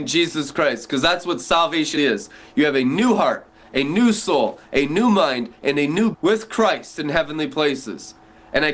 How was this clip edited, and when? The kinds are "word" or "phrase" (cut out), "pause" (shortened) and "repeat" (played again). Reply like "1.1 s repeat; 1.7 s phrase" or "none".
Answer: 2.0 s word; 6.1 s word